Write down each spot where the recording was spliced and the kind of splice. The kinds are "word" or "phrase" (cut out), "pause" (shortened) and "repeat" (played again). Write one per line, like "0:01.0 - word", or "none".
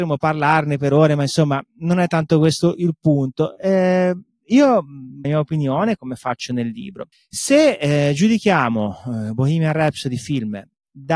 0:05.2 - phrase
0:06.0 - word
0:07.1 - pause